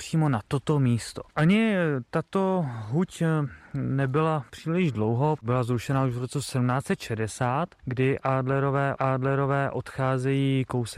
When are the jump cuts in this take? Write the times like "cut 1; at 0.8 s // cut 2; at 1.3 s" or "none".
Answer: cut 1; at 4.5 s // cut 2; at 9.0 s